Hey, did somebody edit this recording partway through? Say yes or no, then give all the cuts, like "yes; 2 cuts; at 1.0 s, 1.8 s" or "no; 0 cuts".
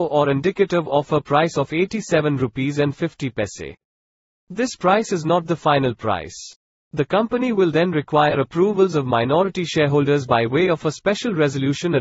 no; 0 cuts